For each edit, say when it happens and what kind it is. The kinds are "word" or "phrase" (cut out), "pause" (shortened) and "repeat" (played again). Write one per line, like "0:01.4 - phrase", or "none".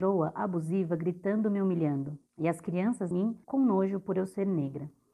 0:02.3 - pause
0:03.1 - phrase
0:03.4 - pause